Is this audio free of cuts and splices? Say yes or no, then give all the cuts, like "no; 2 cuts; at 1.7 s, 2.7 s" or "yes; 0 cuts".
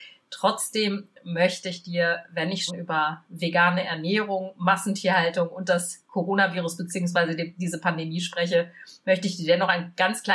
no; 1 cut; at 2.7 s